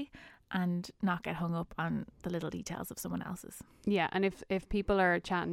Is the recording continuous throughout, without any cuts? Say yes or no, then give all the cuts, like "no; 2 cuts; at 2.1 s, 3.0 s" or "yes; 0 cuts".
yes; 0 cuts